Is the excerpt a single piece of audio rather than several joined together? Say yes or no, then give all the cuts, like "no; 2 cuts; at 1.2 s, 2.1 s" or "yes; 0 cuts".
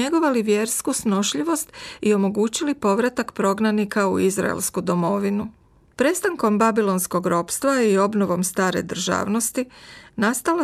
yes; 0 cuts